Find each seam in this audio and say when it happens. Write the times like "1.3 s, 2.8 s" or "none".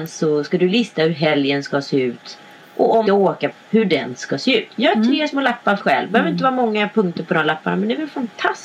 3.1 s, 3.5 s, 5.8 s